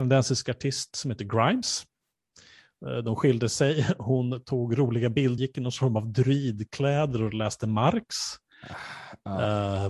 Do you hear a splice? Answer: yes; 1 cut; at 5.4 s

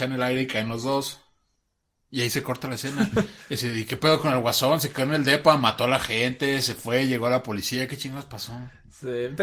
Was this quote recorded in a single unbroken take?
yes; 0 cuts

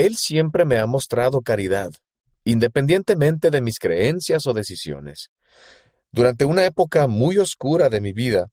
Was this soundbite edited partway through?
no; 0 cuts

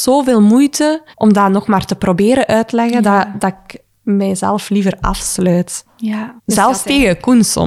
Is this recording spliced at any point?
yes; 2 cuts; at 1.1 s, 6.4 s

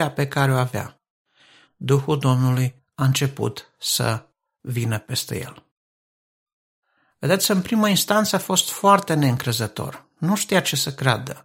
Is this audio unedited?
yes; 0 cuts

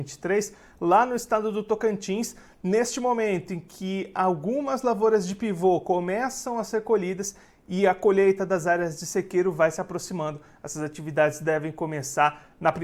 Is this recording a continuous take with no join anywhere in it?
yes; 0 cuts

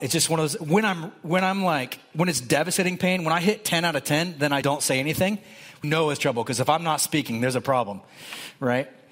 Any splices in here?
yes; 2 cuts; at 4.6 s, 5.8 s

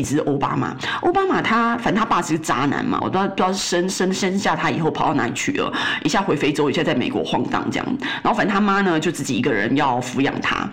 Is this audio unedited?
no; 1 cut; at 3.0 s

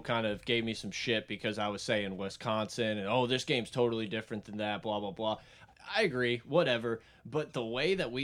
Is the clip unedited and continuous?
yes; 0 cuts

